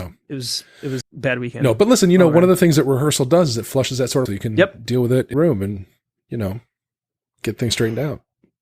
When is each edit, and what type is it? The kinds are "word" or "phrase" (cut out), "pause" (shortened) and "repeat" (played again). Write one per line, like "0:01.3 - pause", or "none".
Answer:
0:01.0 - word
0:04.3 - phrase
0:05.3 - word